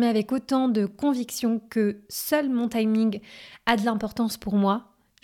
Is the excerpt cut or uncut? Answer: uncut